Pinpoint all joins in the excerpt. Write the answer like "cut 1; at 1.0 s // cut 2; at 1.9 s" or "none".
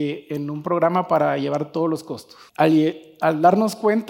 cut 1; at 2.5 s